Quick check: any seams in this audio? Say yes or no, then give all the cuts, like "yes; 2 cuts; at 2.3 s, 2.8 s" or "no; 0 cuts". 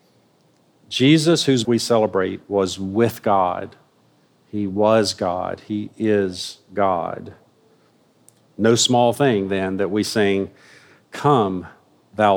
yes; 1 cut; at 1.6 s